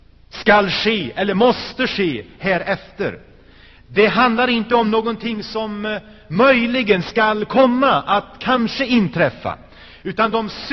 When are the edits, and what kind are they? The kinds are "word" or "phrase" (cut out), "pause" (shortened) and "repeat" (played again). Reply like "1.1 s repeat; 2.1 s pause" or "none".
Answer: none